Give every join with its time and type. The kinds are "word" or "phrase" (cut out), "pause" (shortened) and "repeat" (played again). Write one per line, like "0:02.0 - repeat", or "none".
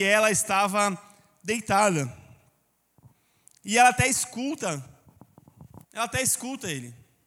0:05.8 - pause